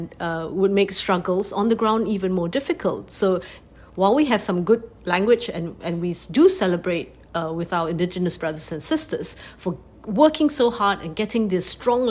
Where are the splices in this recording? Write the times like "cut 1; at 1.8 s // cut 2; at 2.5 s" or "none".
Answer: none